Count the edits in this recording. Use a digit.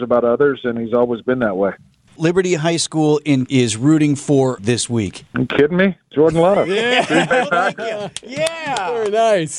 4